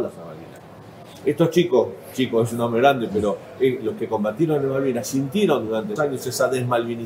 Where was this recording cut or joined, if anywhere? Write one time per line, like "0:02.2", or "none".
0:06.0